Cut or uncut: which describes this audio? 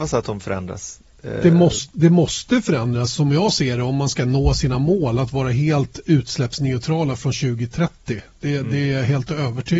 uncut